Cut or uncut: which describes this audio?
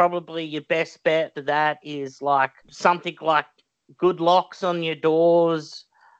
cut